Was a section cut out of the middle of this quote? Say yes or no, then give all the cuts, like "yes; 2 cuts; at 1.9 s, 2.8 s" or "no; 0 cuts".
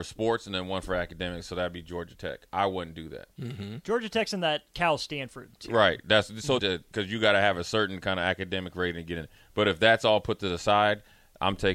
yes; 2 cuts; at 3.3 s, 6.6 s